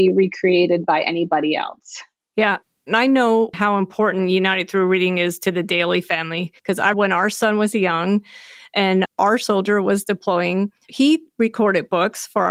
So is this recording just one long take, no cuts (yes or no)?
no